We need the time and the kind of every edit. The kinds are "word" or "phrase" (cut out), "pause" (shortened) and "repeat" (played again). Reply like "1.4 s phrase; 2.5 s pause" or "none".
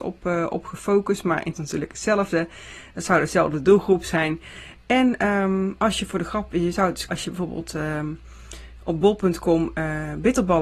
1.5 s phrase; 7.1 s phrase